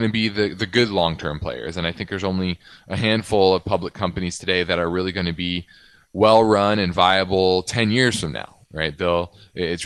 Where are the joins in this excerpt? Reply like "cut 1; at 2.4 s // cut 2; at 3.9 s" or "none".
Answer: none